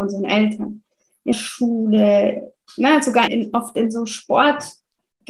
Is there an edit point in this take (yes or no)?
yes